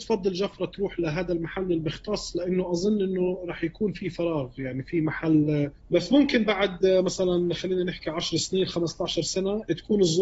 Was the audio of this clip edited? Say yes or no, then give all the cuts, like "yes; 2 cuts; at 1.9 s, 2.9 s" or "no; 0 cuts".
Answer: yes; 1 cut; at 5.8 s